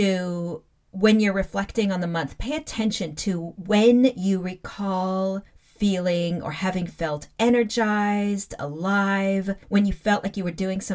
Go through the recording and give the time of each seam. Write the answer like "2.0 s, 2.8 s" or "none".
5.5 s, 9.6 s